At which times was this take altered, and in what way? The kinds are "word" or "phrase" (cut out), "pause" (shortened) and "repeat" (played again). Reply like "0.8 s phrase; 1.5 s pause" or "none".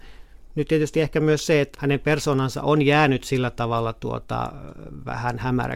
1.7 s word